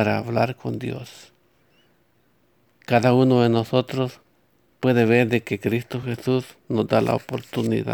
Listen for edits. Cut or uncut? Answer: uncut